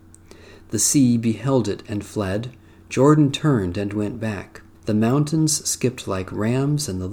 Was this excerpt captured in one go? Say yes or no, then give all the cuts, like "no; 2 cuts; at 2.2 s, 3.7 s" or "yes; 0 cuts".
no; 1 cut; at 4.7 s